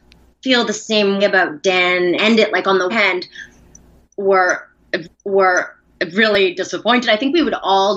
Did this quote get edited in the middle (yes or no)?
yes